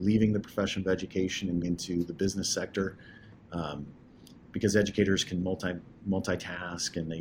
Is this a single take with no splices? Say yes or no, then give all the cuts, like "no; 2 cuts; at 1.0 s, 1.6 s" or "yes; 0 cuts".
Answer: no; 1 cut; at 1.6 s